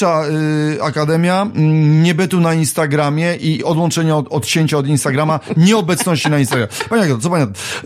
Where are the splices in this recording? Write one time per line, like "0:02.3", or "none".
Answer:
0:03.6